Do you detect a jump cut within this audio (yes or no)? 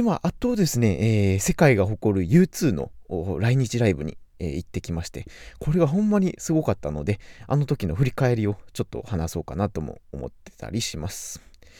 no